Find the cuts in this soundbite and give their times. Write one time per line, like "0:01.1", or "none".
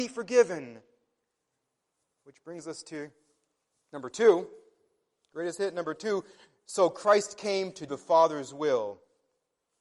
0:07.9